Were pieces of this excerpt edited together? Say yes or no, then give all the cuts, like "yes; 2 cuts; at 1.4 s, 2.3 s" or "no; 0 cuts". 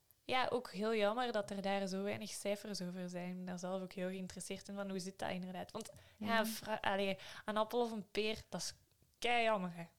no; 0 cuts